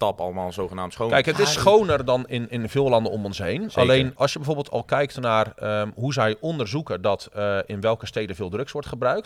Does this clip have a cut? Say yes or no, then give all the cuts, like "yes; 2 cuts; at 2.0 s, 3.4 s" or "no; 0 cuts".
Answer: yes; 1 cut; at 4.2 s